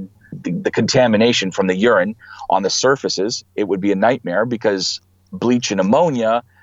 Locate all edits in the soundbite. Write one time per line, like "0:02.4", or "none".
none